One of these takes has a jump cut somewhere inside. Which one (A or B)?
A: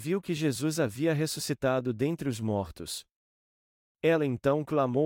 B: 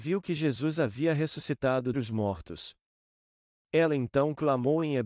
B